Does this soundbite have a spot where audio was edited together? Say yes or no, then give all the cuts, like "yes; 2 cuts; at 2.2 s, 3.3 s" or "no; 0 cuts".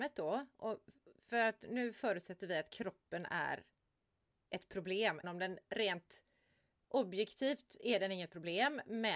yes; 1 cut; at 5.2 s